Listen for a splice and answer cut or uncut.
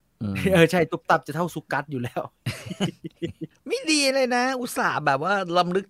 cut